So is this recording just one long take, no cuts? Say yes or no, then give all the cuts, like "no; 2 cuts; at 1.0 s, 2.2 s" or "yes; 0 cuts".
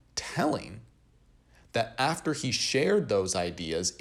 yes; 0 cuts